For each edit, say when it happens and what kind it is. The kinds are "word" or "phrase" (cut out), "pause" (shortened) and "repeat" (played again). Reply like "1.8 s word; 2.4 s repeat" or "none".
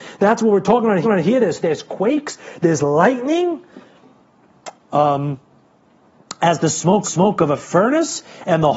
1.0 s repeat; 1.6 s word; 4.8 s pause; 7.0 s repeat

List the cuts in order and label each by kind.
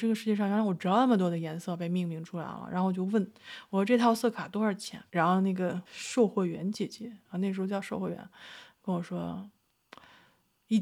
5.1 s pause; 5.9 s pause

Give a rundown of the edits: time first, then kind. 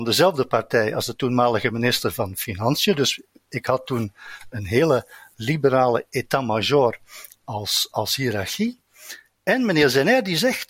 none

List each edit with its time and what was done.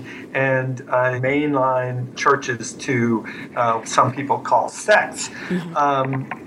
1.2 s phrase; 2.1 s word; 3.8 s phrase

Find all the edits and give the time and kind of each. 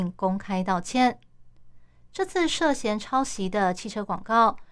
none

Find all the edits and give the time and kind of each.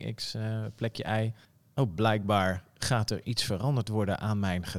1.4 s pause

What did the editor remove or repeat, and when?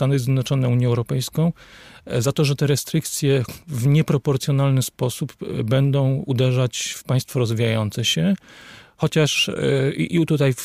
none

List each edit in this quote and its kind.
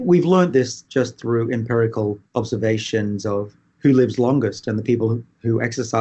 2.3 s pause

